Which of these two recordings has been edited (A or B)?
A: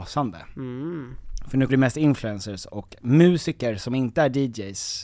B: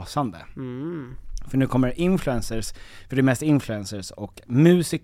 A